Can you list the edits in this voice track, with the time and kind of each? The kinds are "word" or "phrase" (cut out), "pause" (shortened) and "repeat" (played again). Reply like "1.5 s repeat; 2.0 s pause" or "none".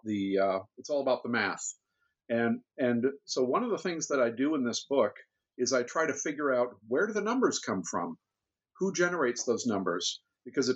none